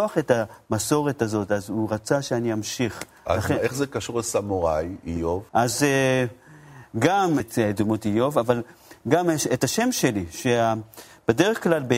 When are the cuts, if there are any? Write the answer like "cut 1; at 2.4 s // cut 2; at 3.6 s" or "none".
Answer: cut 1; at 5.5 s // cut 2; at 7.4 s